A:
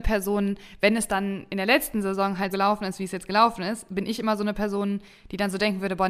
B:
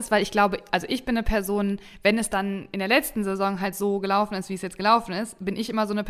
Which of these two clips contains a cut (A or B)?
A